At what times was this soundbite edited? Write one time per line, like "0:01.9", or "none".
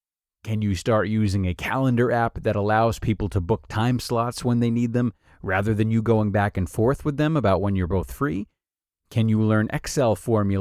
none